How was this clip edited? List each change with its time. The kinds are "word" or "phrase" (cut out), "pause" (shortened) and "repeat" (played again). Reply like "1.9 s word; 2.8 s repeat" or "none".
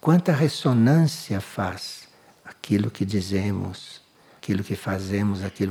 none